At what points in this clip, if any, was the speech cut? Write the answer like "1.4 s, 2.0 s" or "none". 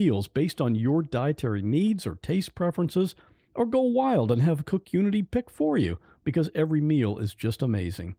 none